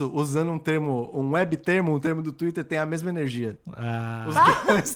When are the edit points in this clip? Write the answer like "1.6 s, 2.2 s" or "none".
none